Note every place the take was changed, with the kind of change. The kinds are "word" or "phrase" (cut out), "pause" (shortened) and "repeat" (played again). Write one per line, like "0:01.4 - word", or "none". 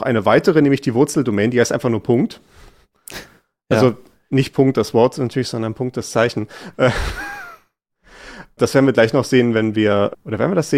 none